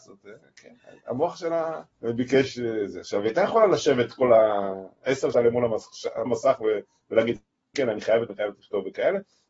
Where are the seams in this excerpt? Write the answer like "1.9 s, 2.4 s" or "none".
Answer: 1.9 s, 5.3 s, 6.3 s, 7.7 s, 8.3 s